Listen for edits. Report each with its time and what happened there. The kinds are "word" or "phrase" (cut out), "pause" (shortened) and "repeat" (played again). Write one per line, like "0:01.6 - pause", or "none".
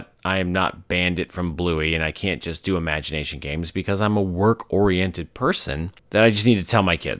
0:06.0 - pause